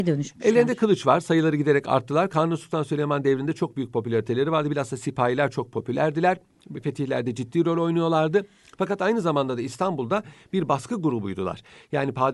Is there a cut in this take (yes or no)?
no